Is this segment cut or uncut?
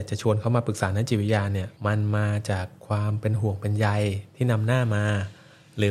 cut